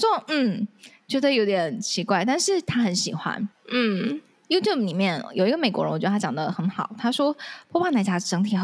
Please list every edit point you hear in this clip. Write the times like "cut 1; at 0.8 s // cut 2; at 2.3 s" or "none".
cut 1; at 3.5 s